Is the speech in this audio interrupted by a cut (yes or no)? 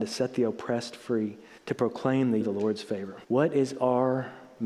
yes